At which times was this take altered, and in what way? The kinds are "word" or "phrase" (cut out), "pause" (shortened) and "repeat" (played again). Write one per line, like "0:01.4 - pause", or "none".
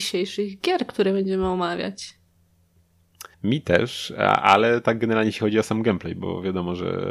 0:03.3 - pause